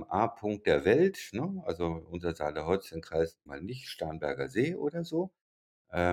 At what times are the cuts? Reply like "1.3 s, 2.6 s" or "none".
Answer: 3.5 s